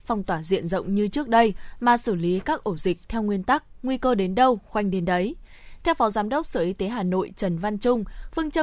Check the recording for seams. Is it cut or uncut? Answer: uncut